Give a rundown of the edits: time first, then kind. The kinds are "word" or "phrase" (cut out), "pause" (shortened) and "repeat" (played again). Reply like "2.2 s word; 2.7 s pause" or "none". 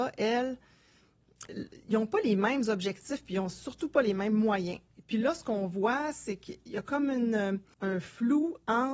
1.5 s word